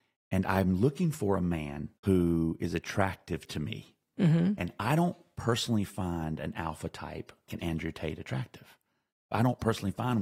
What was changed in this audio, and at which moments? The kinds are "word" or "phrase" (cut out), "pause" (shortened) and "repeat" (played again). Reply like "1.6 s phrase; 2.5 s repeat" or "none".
2.0 s pause; 7.5 s word